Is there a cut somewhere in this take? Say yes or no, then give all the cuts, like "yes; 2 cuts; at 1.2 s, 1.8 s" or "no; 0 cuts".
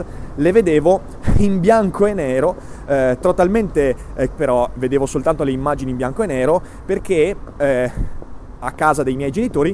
yes; 1 cut; at 4.4 s